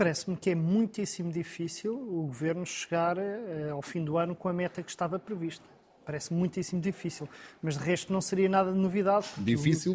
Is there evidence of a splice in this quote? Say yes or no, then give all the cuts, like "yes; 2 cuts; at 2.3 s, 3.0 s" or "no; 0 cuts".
no; 0 cuts